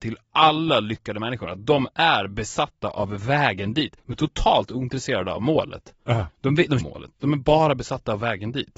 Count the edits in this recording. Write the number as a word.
three